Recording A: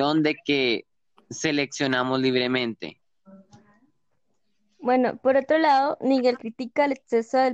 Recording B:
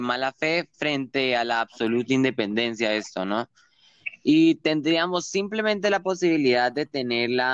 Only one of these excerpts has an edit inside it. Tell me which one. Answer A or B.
A